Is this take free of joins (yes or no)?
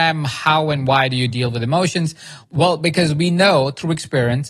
yes